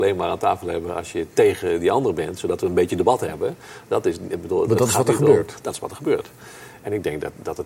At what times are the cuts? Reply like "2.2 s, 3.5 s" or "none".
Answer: none

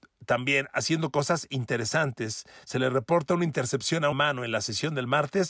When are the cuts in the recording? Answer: 4.1 s

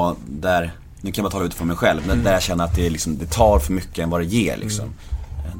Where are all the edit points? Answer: none

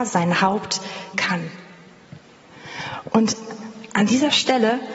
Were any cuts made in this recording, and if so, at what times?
1.1 s

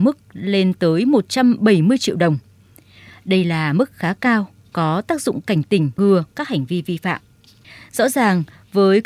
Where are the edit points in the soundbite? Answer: 6.0 s

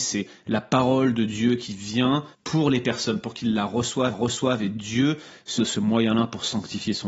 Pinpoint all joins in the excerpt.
2.3 s, 4.1 s, 5.6 s

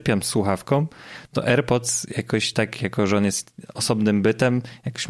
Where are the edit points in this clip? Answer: none

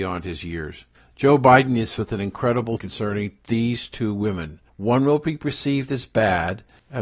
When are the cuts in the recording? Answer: 2.0 s, 2.8 s

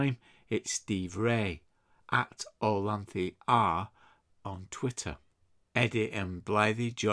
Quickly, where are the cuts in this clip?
none

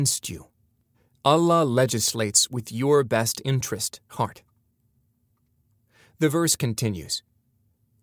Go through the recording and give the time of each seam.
0.9 s, 4.1 s

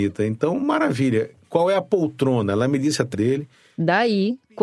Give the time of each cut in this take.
3.1 s

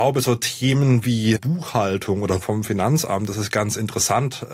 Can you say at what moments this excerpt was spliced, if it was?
1.4 s, 2.4 s

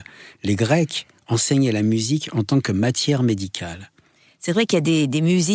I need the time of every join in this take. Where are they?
none

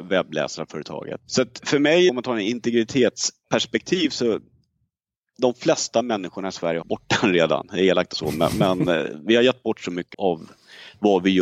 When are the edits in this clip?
1.6 s, 2.1 s, 6.8 s, 8.1 s, 10.1 s

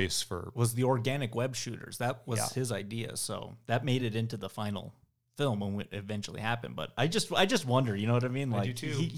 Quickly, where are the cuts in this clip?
none

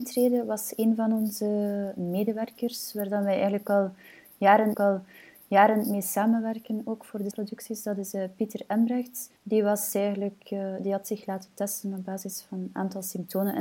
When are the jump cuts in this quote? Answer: 4.7 s, 7.3 s, 9.4 s

